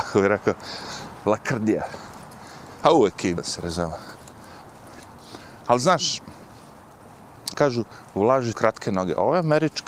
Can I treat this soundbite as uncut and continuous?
no; 3 cuts; at 3.4 s, 7.5 s, 8.5 s

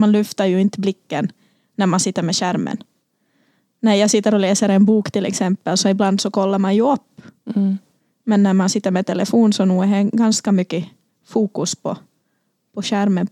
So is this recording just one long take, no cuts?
yes; 0 cuts

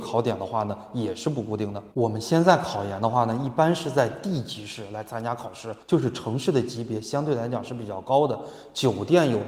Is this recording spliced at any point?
yes; 2 cuts; at 1.9 s, 5.8 s

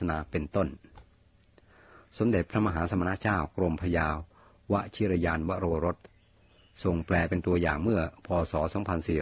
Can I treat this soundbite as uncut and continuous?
yes; 0 cuts

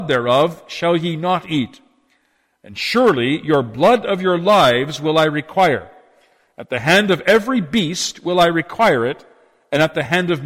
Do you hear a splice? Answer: no; 0 cuts

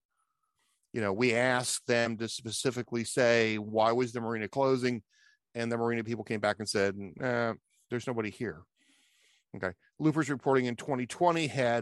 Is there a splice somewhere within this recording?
no; 0 cuts

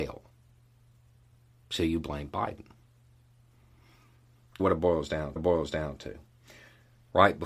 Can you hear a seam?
yes; 2 cuts; at 4.6 s, 5.4 s

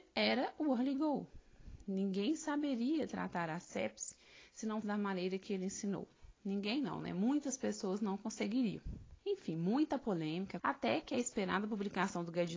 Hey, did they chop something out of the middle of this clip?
yes; 3 cuts; at 4.8 s, 9.2 s, 10.6 s

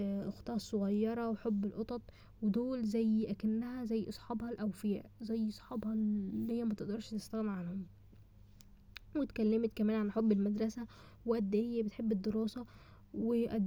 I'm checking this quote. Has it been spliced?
no; 0 cuts

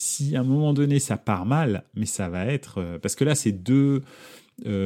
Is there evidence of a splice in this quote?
no; 0 cuts

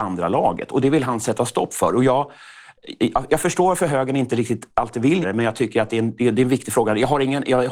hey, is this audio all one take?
no; 2 cuts; at 3.3 s, 5.2 s

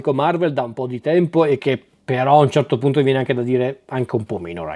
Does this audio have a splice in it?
no; 0 cuts

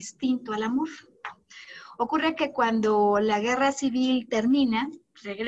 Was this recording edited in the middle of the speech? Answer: no; 0 cuts

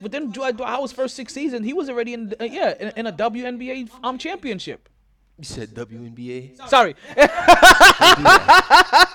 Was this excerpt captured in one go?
yes; 0 cuts

